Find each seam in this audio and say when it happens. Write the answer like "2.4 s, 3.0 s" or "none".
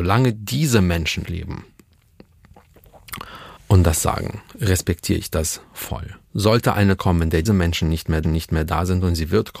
1.2 s, 3.6 s, 4.5 s, 6.2 s, 7.0 s, 7.5 s, 8.2 s